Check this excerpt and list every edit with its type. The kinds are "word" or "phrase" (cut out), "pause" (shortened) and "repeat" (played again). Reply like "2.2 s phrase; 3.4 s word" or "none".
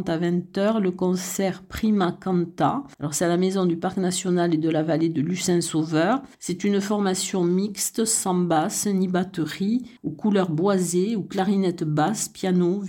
2.9 s pause; 6.3 s pause; 10.0 s pause